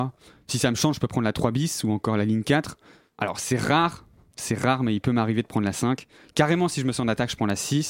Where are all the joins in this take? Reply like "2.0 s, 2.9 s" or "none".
none